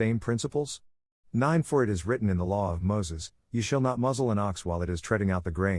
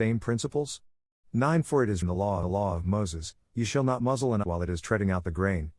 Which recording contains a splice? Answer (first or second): second